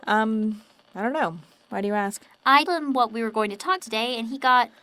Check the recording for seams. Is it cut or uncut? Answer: cut